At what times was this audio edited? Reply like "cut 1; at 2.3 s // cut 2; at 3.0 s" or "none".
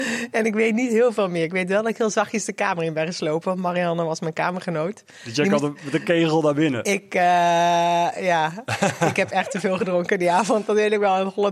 none